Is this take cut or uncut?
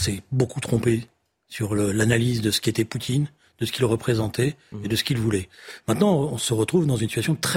uncut